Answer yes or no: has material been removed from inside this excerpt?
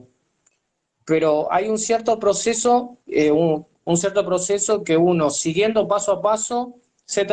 yes